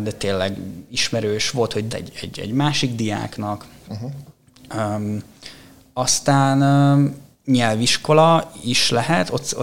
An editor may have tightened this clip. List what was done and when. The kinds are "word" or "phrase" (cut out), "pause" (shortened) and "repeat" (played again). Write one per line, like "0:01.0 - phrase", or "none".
0:01.9 - phrase
0:07.3 - pause